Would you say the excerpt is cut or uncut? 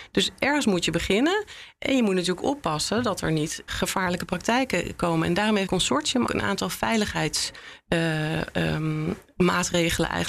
cut